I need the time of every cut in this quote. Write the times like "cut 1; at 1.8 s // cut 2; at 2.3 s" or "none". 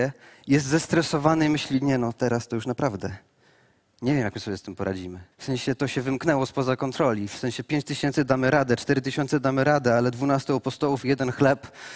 cut 1; at 5.3 s